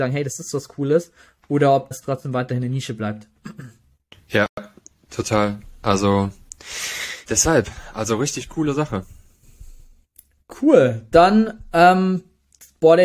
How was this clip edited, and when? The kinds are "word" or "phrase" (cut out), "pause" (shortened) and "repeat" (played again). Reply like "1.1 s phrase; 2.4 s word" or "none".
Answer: 1.9 s word; 7.3 s word